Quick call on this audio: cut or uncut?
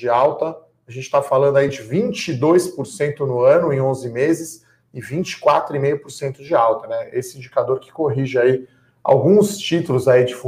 uncut